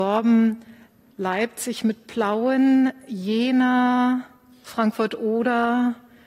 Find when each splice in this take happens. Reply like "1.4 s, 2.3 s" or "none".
none